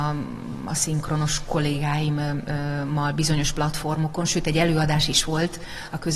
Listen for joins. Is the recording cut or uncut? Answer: uncut